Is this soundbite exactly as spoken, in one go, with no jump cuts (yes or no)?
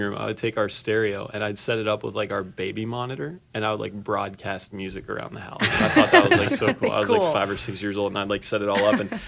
yes